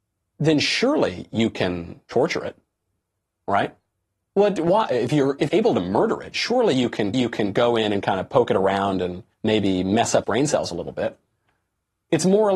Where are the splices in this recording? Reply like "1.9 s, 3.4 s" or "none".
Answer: 4.0 s, 5.5 s, 7.1 s, 9.3 s, 10.2 s